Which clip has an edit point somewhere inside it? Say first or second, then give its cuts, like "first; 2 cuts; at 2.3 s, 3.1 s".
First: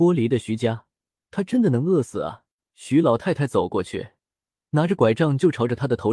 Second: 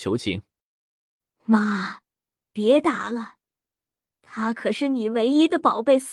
first; 1 cut; at 2.6 s